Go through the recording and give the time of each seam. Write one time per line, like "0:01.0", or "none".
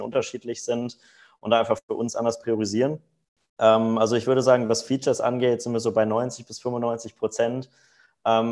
none